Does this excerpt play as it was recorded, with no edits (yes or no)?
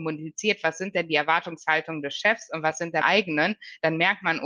no